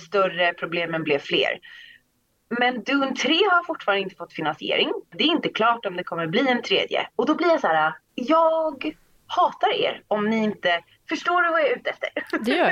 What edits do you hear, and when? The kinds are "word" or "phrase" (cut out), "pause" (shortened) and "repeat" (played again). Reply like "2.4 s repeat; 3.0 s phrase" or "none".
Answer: 5.0 s pause; 10.9 s pause